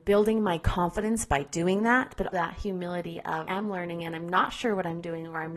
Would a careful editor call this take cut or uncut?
cut